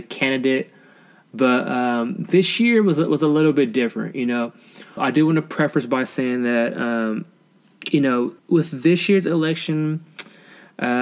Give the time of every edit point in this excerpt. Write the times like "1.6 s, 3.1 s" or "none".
5.0 s, 8.4 s